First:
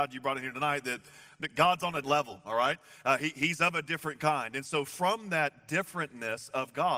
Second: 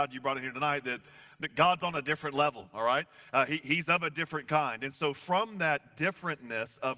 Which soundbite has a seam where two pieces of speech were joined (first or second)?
first